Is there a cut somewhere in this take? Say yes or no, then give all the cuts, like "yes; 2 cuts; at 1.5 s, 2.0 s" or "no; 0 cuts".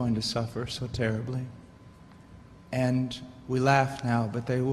no; 0 cuts